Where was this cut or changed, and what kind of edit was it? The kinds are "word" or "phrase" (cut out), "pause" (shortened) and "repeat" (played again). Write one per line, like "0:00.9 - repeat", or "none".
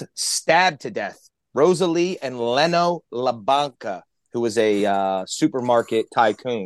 none